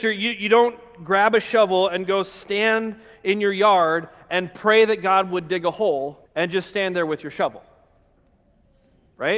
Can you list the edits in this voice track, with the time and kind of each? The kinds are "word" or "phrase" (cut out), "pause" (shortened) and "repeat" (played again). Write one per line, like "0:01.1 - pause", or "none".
0:06.3 - pause